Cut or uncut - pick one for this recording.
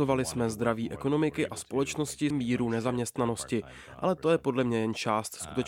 cut